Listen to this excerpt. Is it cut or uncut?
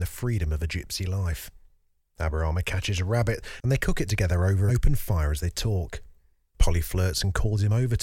cut